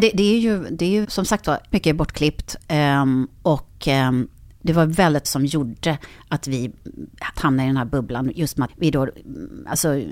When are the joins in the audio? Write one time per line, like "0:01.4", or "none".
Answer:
0:01.0
0:01.7
0:05.2
0:07.3
0:08.7